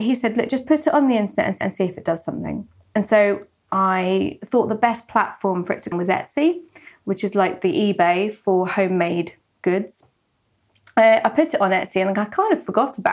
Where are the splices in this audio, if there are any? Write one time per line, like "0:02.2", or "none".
0:01.6
0:05.9